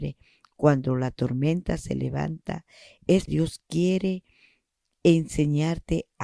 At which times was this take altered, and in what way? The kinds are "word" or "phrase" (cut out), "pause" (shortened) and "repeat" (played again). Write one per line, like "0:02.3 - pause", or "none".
0:03.3 - word